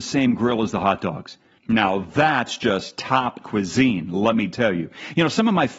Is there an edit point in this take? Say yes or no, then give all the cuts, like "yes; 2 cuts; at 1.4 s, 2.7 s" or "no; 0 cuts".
yes; 1 cut; at 3.4 s